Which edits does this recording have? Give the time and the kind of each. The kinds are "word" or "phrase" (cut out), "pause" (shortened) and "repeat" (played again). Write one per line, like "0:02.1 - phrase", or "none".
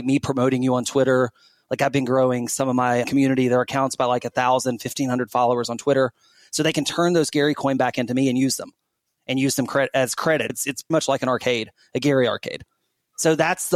0:03.0 - word
0:10.5 - word
0:10.9 - word